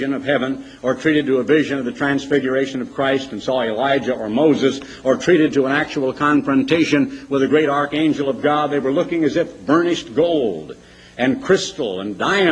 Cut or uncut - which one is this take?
uncut